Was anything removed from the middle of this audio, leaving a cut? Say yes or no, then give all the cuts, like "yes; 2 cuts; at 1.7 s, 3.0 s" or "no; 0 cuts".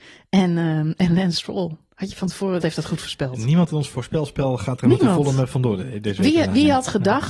yes; 1 cut; at 2.6 s